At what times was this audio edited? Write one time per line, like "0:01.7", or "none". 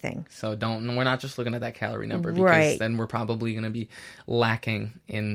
none